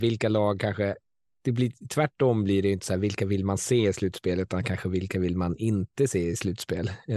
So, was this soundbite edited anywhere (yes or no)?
no